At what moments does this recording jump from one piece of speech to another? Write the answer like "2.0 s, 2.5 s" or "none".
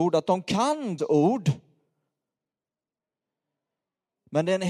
1.0 s